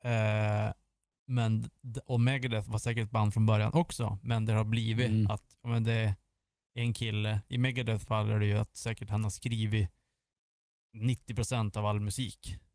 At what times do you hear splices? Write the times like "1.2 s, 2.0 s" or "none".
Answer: none